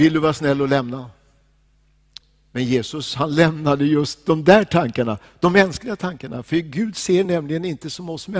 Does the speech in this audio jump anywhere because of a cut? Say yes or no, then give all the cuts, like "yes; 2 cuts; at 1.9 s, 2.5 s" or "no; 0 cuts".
no; 0 cuts